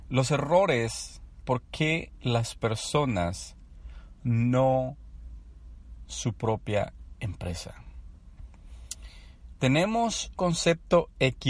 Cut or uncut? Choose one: cut